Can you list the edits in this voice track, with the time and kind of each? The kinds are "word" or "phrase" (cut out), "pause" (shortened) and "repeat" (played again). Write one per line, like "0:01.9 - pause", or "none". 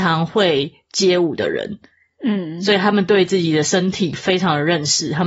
none